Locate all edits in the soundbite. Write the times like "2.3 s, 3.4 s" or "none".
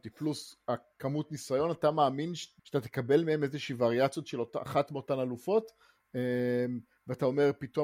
2.6 s